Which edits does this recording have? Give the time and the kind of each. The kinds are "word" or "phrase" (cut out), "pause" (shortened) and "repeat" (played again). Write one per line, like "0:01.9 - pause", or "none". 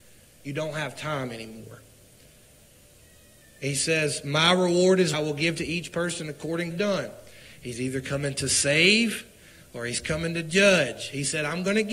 0:05.1 - phrase
0:06.7 - phrase